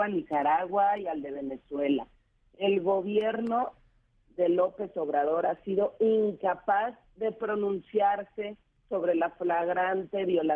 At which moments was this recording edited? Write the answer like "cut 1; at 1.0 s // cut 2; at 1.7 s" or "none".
none

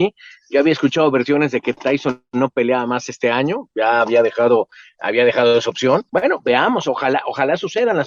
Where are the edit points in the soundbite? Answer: cut 1; at 6.1 s

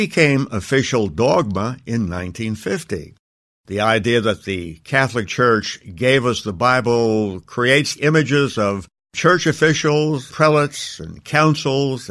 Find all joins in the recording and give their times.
cut 1; at 8.0 s // cut 2; at 10.3 s

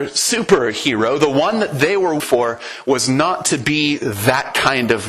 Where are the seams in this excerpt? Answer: cut 1; at 2.2 s

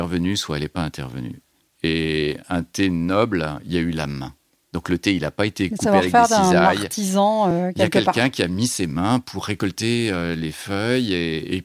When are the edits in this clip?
none

